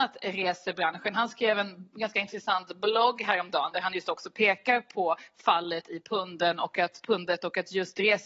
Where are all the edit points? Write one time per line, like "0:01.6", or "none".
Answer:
none